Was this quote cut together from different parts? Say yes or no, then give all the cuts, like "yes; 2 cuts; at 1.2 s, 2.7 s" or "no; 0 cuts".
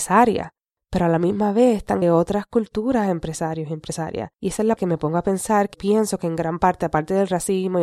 yes; 4 cuts; at 2.0 s, 4.3 s, 4.8 s, 5.7 s